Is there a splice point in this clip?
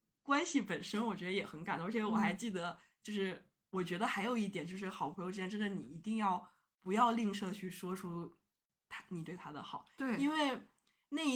no; 0 cuts

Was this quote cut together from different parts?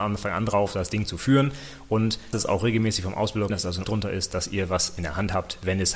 yes; 3 cuts; at 2.3 s, 3.5 s, 3.8 s

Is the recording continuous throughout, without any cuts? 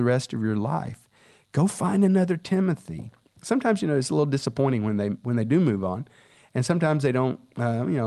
yes; 0 cuts

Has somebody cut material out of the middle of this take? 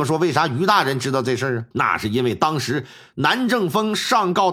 yes; 1 cut; at 1.7 s

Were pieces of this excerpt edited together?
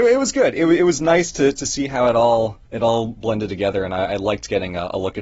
yes; 1 cut; at 2.6 s

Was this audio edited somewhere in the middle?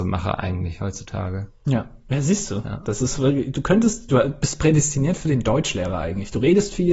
no; 0 cuts

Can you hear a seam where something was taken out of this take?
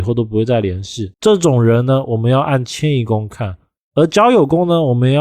yes; 1 cut; at 1.1 s

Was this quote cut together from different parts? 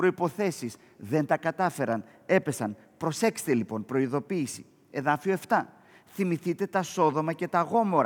no; 0 cuts

